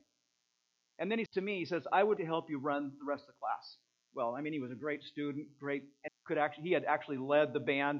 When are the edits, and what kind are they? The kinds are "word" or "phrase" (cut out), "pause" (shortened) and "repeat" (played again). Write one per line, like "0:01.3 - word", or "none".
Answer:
0:01.3 - word
0:02.2 - word
0:06.1 - word